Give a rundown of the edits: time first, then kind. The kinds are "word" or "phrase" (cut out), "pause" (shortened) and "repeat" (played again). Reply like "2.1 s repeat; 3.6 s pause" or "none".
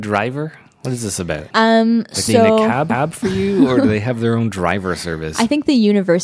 1.5 s pause; 2.3 s phrase; 2.9 s repeat